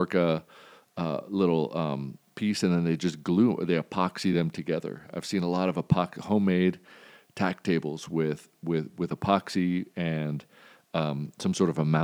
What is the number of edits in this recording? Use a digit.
0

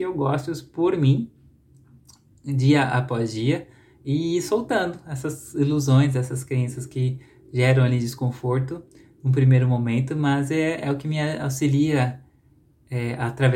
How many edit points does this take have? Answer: 0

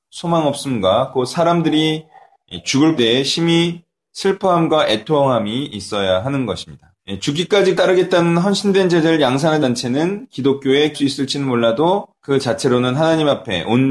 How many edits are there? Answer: 6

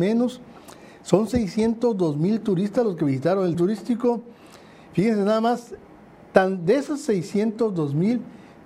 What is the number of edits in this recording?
1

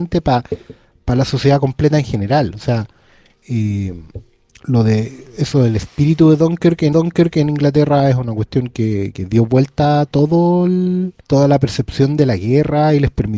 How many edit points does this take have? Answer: 2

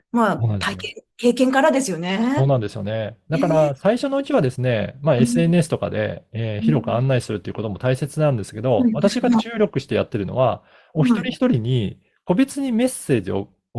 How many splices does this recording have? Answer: 0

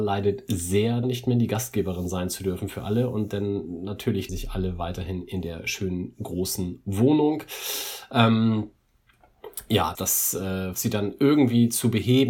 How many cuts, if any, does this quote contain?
4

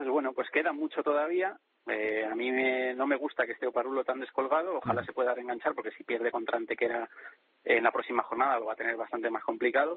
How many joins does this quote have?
0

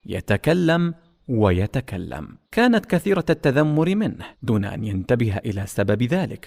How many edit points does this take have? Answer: 2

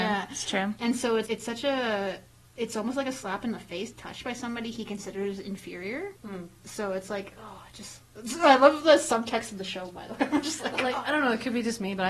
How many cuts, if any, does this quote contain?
3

